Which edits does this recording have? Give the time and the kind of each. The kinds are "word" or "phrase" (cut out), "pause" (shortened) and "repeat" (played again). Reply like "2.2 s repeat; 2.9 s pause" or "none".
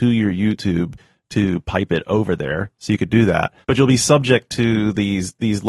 3.6 s pause